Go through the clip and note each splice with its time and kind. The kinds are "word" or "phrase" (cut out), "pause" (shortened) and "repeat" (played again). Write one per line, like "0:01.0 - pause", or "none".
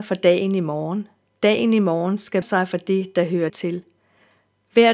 0:02.4 - word
0:03.5 - word

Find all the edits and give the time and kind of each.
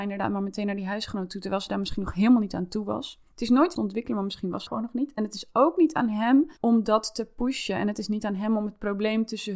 0:03.3 - pause
0:03.7 - phrase
0:04.7 - word
0:06.6 - pause

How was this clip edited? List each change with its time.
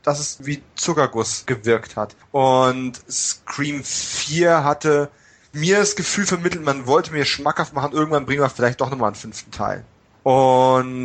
none

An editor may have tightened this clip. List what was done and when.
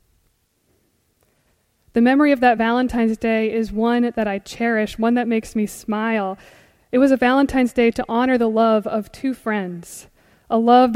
none

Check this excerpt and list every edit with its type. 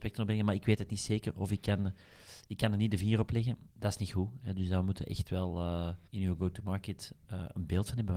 0:03.7 - pause
0:06.1 - pause

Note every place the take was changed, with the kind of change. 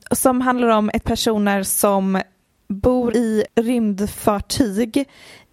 0:01.0 - word
0:03.1 - word
0:03.5 - word

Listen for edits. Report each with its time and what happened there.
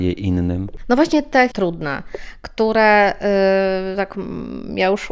0:01.5 - word

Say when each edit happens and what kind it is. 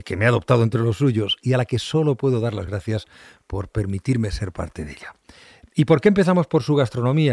none

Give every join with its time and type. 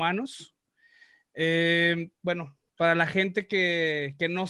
none

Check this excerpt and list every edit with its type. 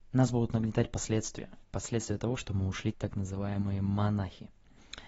0:01.6 - pause
0:02.9 - word

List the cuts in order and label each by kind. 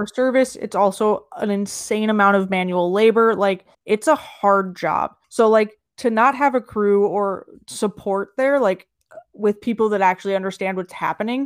0:03.7 - pause
0:05.2 - pause
0:05.9 - pause

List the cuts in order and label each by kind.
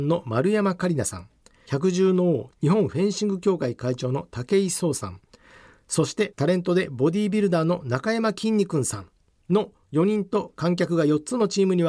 none

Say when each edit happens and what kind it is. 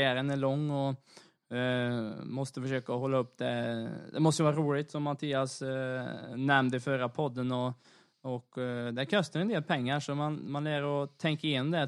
none

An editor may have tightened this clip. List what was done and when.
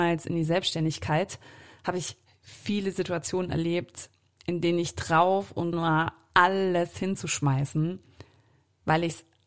0:05.7 - word

